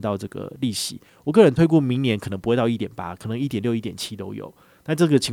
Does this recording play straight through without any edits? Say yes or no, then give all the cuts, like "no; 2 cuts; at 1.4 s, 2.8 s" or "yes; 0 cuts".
yes; 0 cuts